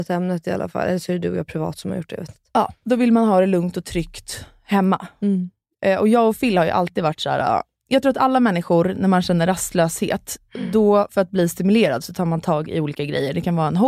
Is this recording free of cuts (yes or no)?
yes